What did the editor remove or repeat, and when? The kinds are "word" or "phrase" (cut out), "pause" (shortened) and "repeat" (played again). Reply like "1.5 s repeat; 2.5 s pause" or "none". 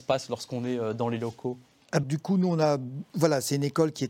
2.0 s word